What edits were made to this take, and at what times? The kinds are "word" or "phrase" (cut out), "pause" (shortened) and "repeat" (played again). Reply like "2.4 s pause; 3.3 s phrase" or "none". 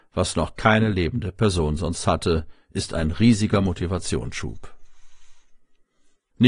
none

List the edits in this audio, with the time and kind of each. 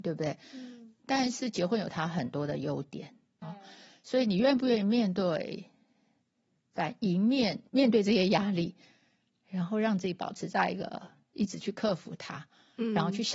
3.4 s word; 7.7 s pause

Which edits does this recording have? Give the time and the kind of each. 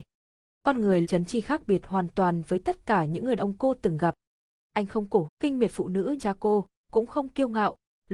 1.0 s word; 3.4 s word; 5.2 s word; 6.2 s word

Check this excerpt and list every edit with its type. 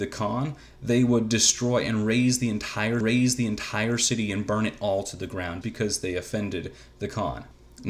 3.0 s repeat; 5.6 s word

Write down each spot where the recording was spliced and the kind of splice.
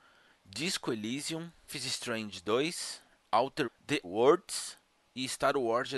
1.7 s word; 3.6 s word; 4.0 s word

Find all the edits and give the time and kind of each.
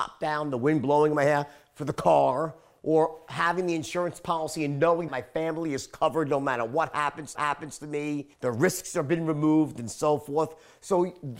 5.1 s word; 7.3 s repeat; 8.3 s pause

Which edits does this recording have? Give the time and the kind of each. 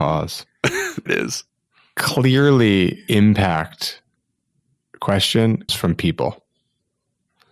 1.1 s word; 3.1 s word; 5.7 s word

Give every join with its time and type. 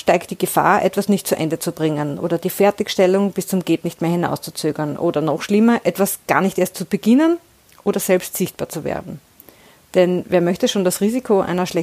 none

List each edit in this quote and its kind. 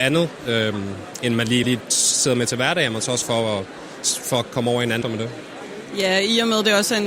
1.6 s word; 3.2 s word; 5.0 s phrase

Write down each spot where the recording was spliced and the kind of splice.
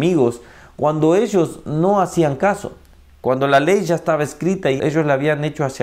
4.8 s word

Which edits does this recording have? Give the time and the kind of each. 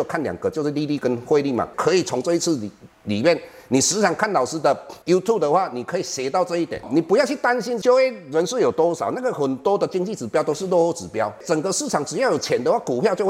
5.0 s pause

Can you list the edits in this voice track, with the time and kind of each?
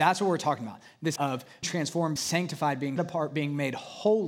1.2 s word; 1.6 s word; 2.2 s word; 3.0 s word

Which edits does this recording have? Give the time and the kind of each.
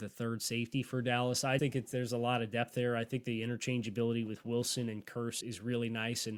1.6 s word; 5.4 s word

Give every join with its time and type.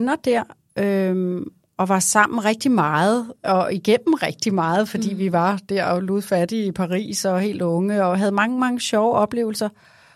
none

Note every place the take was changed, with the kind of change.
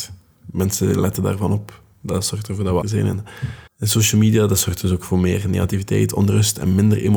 2.8 s word; 3.7 s pause

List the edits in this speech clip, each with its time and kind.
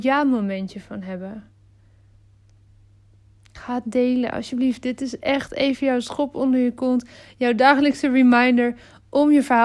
none

